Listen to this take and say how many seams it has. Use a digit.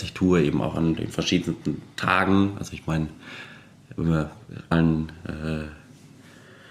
1